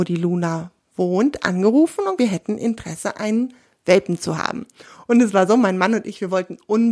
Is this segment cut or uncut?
cut